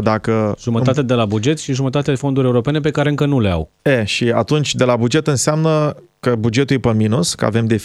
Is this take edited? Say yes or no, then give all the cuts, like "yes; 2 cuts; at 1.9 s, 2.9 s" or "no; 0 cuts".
yes; 1 cut; at 3.8 s